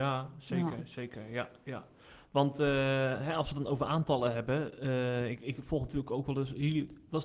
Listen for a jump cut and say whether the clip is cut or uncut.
uncut